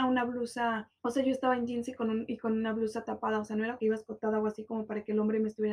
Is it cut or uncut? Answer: cut